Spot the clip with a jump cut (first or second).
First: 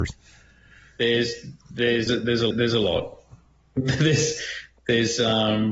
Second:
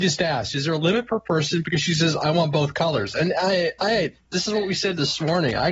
first